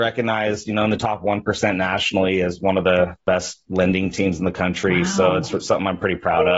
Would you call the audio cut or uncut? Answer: uncut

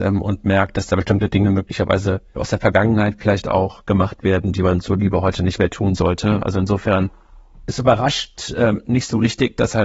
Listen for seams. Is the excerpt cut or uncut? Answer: cut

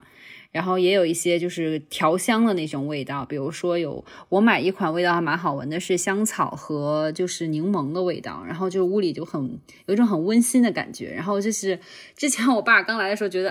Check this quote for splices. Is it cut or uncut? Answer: uncut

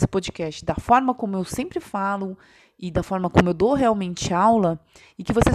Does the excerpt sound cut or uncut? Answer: uncut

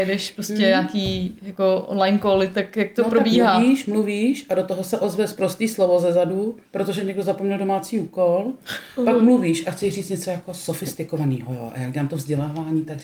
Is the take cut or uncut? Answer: cut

